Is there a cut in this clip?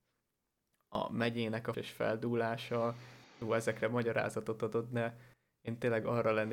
yes; 1 cut; at 1.7 s

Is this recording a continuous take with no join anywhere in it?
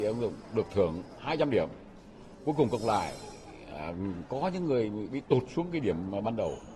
yes; 0 cuts

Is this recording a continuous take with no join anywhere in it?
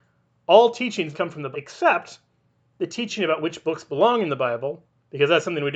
no; 2 cuts; at 1.1 s, 1.5 s

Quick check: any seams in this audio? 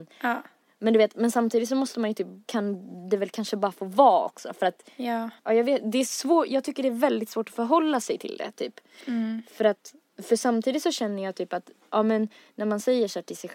yes; 2 cuts; at 2.5 s, 5.4 s

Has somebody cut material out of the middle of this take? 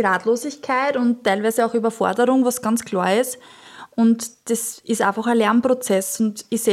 no; 0 cuts

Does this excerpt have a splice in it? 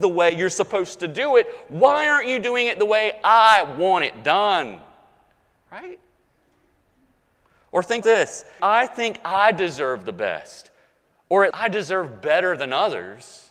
yes; 3 cuts; at 8.0 s, 8.6 s, 11.5 s

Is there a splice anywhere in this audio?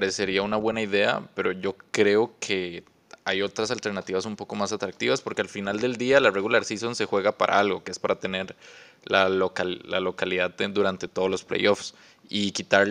no; 0 cuts

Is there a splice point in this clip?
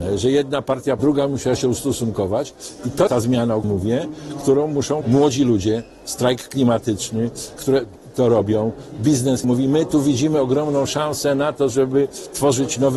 yes; 6 cuts; at 1.0 s, 3.1 s, 3.6 s, 5.0 s, 7.6 s, 9.4 s

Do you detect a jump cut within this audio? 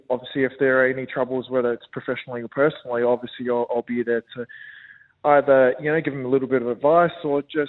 no; 0 cuts

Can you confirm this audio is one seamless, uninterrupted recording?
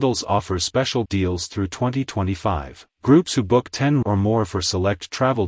no; 3 cuts; at 1.1 s, 2.9 s, 4.0 s

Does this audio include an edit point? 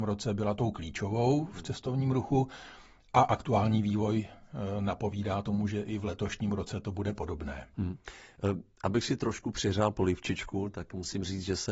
no; 0 cuts

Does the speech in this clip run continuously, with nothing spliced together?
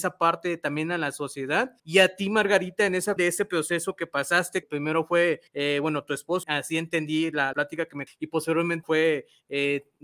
no; 8 cuts; at 1.8 s, 3.2 s, 4.6 s, 5.5 s, 6.4 s, 7.5 s, 8.1 s, 8.8 s

